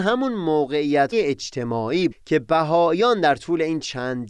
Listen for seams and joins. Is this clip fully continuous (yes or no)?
no